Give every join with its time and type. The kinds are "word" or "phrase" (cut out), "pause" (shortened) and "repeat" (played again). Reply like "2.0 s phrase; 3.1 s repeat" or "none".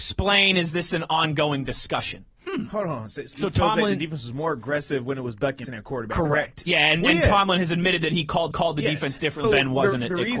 3.3 s phrase; 5.6 s word; 8.5 s repeat; 9.4 s word